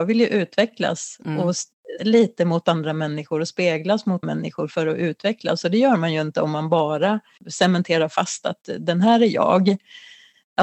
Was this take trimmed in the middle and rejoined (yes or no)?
yes